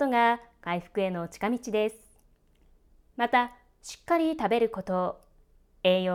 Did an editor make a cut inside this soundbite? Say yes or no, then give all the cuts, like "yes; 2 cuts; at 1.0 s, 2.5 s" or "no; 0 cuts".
no; 0 cuts